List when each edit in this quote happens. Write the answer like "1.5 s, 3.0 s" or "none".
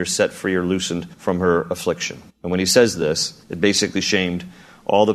1.1 s, 2.3 s, 3.4 s